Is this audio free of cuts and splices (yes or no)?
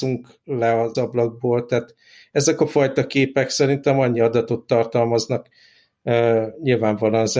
no